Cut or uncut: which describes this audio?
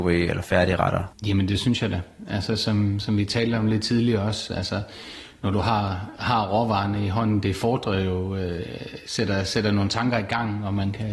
uncut